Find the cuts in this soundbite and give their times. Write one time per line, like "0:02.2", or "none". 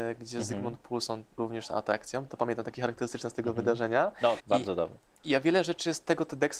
0:01.4
0:02.7
0:04.4